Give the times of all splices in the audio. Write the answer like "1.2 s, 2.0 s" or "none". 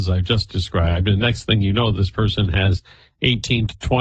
none

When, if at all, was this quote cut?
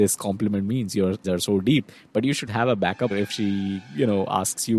1.2 s, 2.5 s, 3.1 s

